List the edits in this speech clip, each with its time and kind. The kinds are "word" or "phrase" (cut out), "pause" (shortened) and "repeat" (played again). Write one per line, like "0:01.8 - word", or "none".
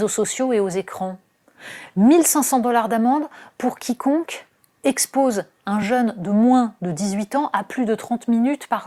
none